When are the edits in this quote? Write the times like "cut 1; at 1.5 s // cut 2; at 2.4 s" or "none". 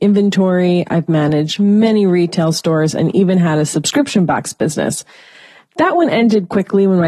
none